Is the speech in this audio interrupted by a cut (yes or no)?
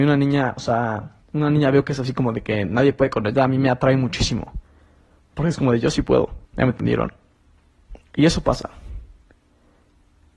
yes